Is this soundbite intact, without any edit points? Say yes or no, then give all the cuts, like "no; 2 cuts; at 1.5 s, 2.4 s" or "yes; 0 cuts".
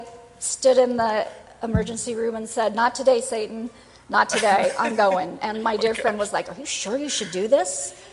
yes; 0 cuts